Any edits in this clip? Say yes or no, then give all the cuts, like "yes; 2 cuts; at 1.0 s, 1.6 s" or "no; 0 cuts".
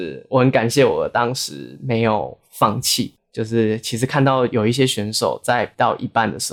yes; 2 cuts; at 2.4 s, 3.2 s